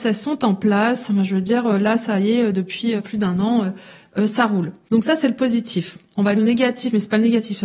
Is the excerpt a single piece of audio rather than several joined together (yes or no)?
no